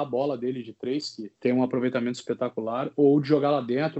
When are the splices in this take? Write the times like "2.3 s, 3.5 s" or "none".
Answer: 1.4 s